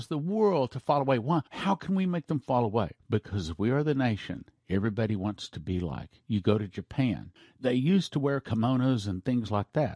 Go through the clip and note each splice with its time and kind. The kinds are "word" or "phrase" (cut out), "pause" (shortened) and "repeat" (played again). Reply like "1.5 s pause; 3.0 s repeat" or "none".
1.5 s pause; 3.0 s pause; 7.4 s pause